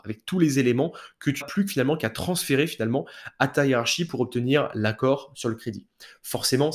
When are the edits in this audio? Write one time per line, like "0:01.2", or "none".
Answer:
0:01.4